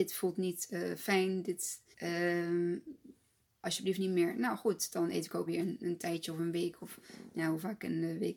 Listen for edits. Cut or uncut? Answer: cut